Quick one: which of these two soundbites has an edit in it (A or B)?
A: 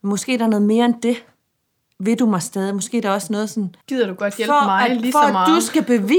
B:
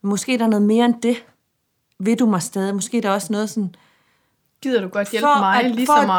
A